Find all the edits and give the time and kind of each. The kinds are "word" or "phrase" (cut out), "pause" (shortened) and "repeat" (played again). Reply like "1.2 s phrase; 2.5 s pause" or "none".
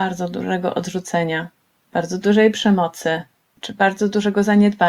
none